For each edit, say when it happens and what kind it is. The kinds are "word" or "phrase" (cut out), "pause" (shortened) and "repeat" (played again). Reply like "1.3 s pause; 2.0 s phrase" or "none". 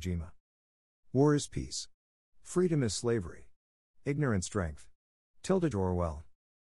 4.5 s word; 5.7 s word